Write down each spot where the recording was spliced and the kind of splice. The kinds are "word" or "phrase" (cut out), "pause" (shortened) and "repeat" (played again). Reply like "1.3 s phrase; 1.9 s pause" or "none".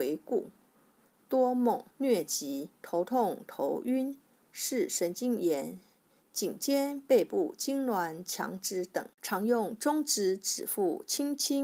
1.9 s pause; 2.8 s pause; 9.1 s pause

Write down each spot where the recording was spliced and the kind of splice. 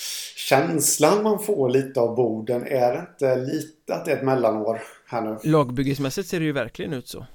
none

